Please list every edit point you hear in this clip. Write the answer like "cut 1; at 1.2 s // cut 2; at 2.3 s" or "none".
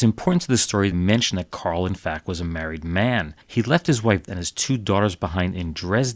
cut 1; at 0.9 s // cut 2; at 3.4 s // cut 3; at 4.3 s